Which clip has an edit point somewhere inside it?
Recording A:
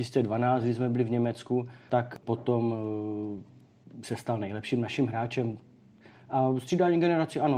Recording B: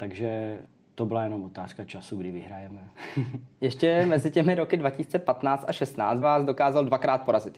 B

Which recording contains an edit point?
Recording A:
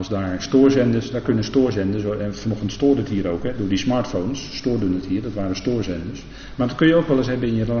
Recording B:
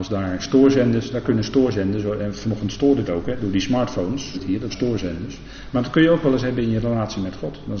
B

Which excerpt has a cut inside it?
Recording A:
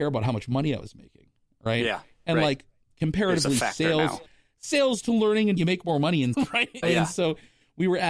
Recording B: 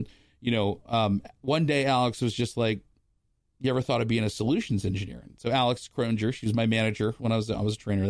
A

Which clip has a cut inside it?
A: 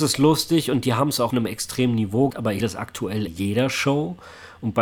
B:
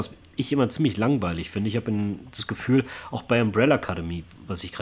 A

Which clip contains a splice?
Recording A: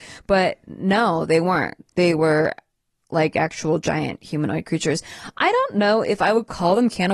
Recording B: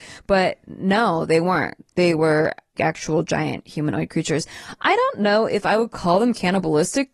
B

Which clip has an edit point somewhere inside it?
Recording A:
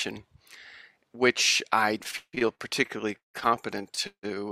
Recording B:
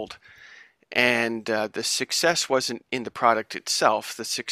A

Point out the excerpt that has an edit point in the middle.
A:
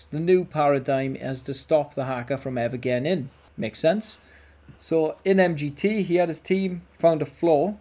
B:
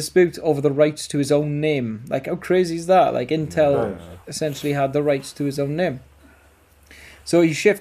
A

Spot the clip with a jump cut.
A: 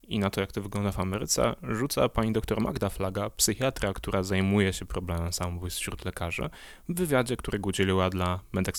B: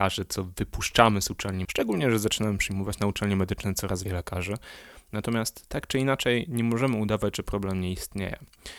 B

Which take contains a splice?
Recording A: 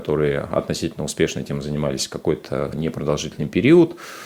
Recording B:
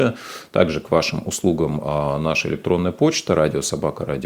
A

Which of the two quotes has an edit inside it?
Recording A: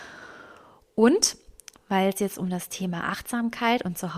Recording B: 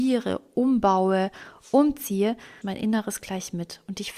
B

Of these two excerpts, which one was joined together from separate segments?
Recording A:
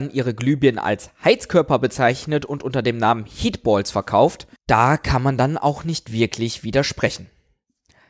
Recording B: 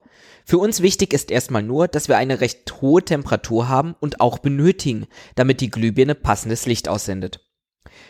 A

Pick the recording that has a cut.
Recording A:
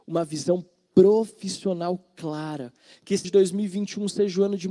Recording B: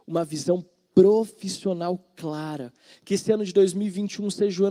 A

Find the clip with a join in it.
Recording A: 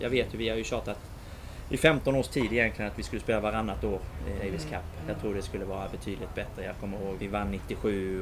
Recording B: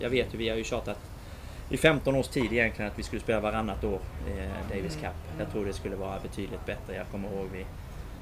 A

